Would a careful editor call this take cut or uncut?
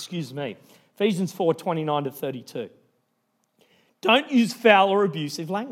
uncut